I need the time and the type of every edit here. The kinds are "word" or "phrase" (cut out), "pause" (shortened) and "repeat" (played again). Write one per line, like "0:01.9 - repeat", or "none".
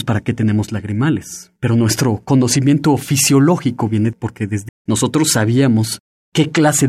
0:01.6 - pause
0:04.1 - word
0:04.7 - word